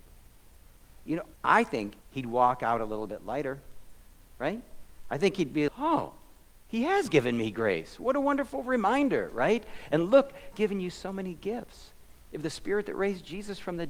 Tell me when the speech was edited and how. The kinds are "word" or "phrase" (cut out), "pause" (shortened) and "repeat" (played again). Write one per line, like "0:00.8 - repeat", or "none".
0:01.3 - pause
0:02.0 - pause
0:05.7 - word
0:10.5 - word